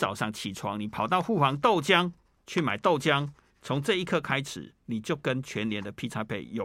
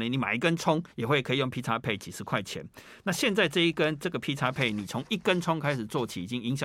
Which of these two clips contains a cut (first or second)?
second